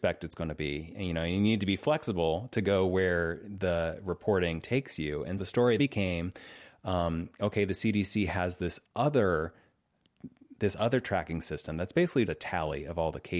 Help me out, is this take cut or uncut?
cut